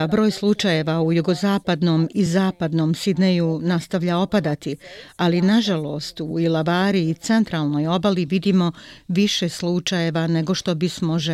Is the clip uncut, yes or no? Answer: yes